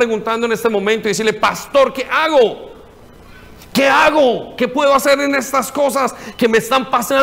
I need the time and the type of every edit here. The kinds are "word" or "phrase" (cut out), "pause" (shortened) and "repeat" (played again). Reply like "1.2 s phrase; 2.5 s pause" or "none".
none